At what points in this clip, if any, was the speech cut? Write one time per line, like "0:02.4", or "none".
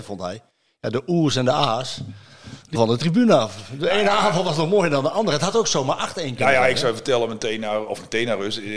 0:02.8